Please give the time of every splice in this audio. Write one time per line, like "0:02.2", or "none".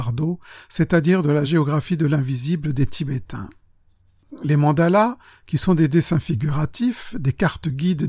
none